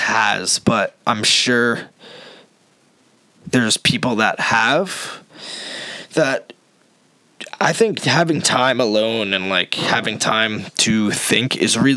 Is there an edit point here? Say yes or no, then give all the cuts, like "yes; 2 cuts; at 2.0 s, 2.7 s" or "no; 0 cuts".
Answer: no; 0 cuts